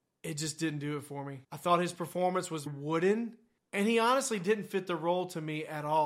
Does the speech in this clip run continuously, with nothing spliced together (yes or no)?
no